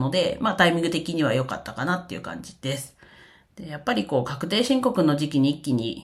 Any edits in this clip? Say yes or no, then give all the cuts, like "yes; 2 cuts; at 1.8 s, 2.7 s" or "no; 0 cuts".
no; 0 cuts